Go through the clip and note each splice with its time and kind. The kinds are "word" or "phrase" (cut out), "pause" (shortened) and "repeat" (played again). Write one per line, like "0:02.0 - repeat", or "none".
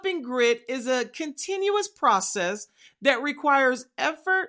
none